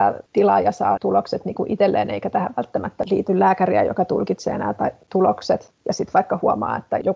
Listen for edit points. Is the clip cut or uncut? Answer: cut